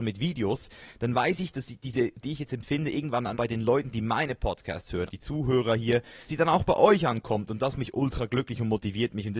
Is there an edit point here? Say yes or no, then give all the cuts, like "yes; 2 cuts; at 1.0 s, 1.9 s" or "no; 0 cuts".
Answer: yes; 5 cuts; at 2.2 s, 3.3 s, 5.1 s, 6.3 s, 7.7 s